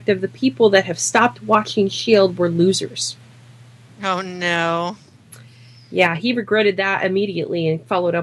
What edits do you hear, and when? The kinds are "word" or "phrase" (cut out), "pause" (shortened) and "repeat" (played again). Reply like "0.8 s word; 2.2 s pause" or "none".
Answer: none

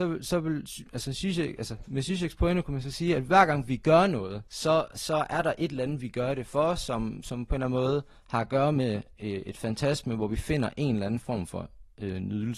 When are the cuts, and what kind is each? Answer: 4.5 s pause

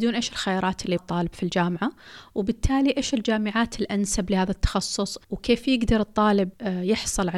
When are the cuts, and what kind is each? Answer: 1.0 s word; 5.2 s pause

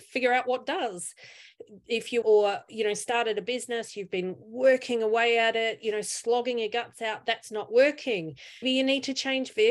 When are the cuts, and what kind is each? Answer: 2.2 s word; 8.6 s word

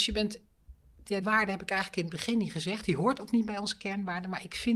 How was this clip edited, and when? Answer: 1.2 s word

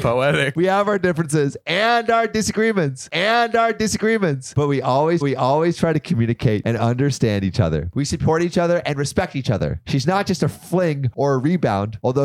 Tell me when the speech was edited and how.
3.1 s repeat; 5.2 s repeat

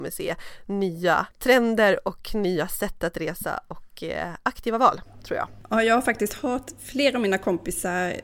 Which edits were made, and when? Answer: 1.3 s pause

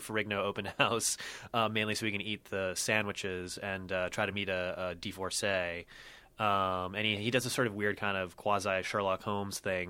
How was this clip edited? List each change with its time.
none

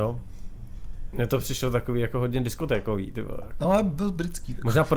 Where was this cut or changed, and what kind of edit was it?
none

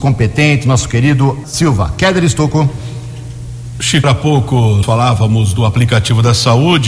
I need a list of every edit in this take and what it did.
1.4 s word; 4.0 s word; 4.8 s word

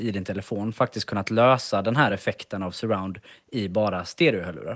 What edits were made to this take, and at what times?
none

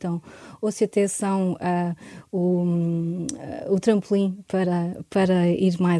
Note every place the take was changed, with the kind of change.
none

